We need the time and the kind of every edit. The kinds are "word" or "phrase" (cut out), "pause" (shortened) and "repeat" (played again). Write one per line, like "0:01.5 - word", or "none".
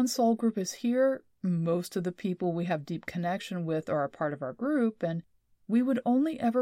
none

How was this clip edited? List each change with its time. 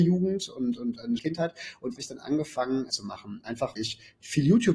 0:01.2 - word
0:02.0 - phrase
0:02.9 - phrase
0:03.8 - word

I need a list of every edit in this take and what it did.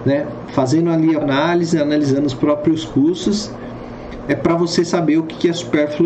0:01.2 - word

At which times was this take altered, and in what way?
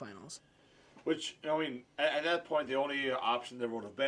none

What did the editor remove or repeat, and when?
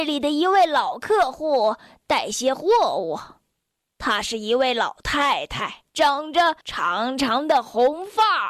0:05.9 - pause
0:06.6 - pause

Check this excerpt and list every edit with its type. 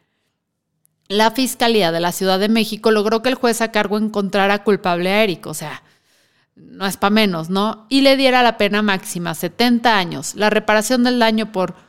none

